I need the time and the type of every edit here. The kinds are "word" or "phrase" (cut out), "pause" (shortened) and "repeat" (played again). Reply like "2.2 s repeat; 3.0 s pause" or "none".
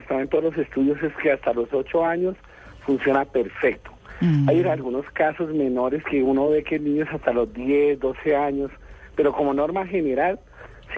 none